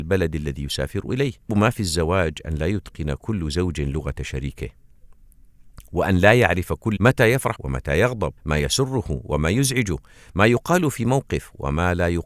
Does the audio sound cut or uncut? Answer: cut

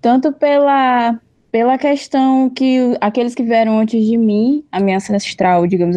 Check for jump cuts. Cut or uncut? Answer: uncut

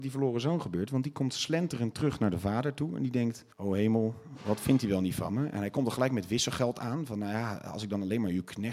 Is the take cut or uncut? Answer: cut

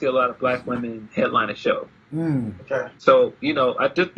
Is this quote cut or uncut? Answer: cut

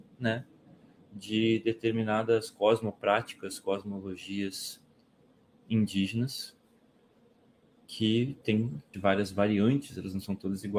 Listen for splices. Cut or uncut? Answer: cut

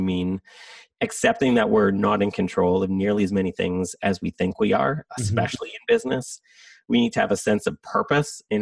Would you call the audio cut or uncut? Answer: uncut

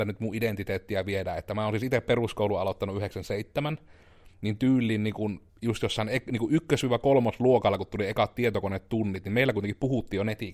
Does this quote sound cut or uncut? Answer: cut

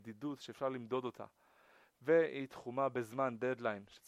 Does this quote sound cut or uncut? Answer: uncut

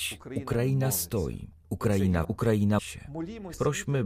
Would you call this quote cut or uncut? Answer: cut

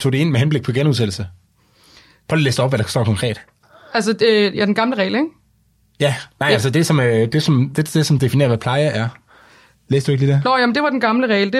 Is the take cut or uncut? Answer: uncut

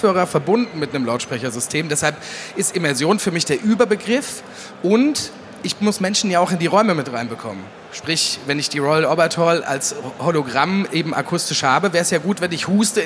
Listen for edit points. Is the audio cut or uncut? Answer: uncut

